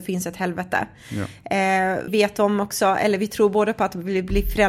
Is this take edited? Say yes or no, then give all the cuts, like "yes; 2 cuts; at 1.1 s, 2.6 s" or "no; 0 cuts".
yes; 1 cut; at 2.1 s